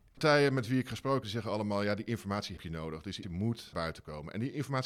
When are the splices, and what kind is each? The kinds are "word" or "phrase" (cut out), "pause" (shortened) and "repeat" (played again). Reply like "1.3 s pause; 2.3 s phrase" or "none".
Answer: 1.2 s word; 2.6 s word; 3.2 s word; 3.7 s word